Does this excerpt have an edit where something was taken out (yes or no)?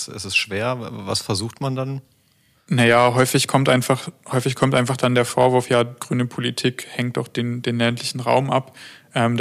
no